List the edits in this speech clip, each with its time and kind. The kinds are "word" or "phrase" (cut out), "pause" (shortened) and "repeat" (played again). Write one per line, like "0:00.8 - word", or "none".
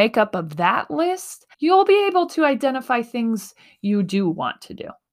0:01.5 - pause